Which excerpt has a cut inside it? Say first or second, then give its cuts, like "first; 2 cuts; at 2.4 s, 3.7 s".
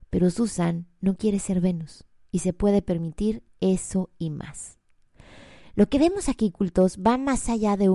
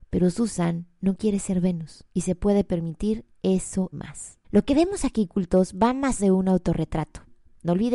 second; 4 cuts; at 2.1 s, 3.9 s, 4.4 s, 6.2 s